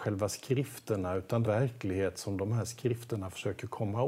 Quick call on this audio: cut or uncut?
cut